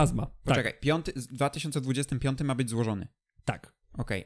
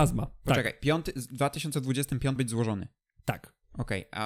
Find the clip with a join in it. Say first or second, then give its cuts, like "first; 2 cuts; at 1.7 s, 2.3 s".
second; 1 cut; at 2.4 s